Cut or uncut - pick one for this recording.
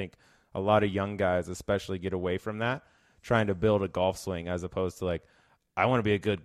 uncut